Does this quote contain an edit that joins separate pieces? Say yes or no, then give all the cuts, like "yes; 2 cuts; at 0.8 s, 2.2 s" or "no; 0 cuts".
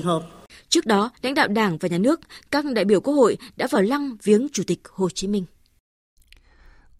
no; 0 cuts